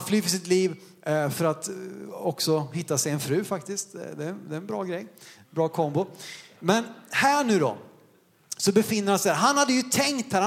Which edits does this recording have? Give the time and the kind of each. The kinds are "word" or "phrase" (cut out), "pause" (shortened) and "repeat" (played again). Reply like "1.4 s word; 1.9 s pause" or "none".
none